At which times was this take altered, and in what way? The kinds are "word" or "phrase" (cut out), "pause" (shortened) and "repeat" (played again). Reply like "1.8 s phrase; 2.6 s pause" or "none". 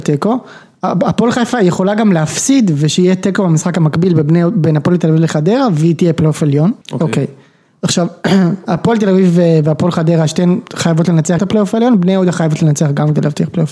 6.8 s pause; 11.4 s phrase